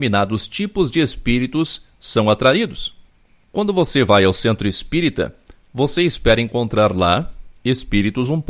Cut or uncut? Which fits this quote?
uncut